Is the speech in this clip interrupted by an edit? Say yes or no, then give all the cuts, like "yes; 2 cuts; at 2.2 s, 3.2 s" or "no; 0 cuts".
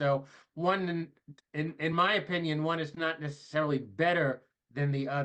no; 0 cuts